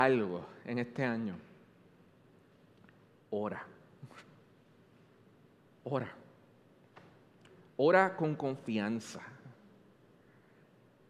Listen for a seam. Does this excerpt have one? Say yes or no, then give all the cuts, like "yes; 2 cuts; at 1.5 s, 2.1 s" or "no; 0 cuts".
no; 0 cuts